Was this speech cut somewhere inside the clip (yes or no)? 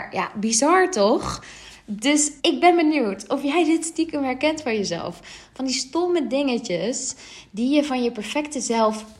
yes